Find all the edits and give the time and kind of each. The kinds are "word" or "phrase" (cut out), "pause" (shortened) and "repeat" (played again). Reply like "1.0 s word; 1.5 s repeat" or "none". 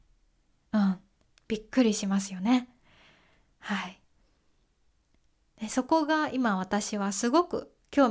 none